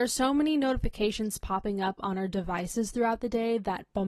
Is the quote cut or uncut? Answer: uncut